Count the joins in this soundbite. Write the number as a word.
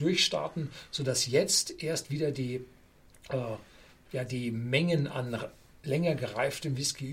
zero